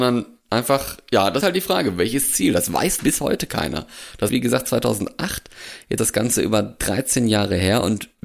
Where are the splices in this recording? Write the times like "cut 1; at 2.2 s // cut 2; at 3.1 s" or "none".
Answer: cut 1; at 1.4 s // cut 2; at 3.0 s // cut 3; at 4.3 s // cut 4; at 6.0 s